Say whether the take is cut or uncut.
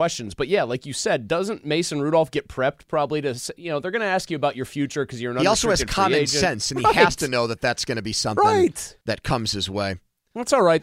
cut